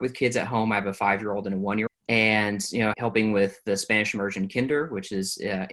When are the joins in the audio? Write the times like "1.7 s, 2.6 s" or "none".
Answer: 1.9 s, 2.9 s